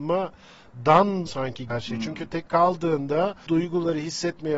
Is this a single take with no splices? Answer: no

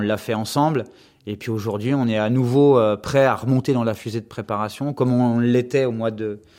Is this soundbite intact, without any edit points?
yes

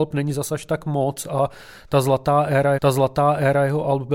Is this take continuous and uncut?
no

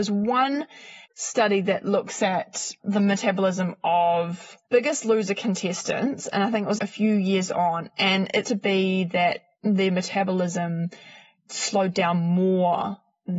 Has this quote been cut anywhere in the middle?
yes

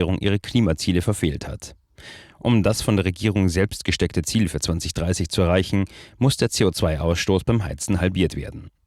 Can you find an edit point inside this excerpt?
no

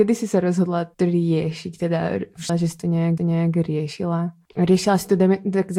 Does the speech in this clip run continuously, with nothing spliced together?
no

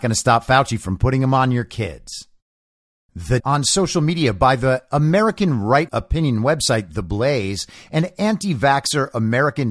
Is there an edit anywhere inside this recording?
yes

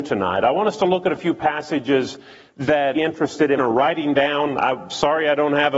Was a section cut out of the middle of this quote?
yes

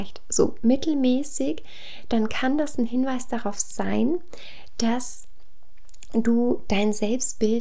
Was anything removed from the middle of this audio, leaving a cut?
no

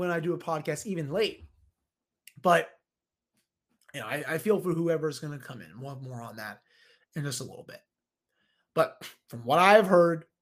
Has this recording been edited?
no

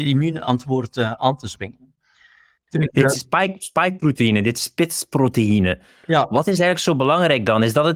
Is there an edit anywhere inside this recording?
no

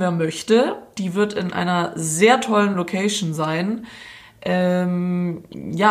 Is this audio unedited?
yes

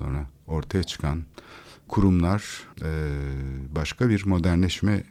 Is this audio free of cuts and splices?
no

